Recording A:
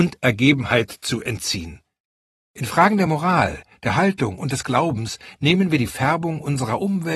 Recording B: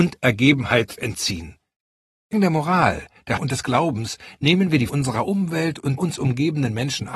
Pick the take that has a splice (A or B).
B